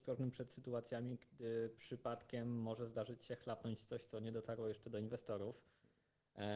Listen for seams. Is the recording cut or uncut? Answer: uncut